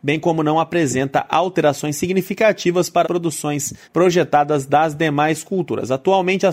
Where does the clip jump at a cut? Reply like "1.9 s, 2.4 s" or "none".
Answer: 3.0 s, 3.8 s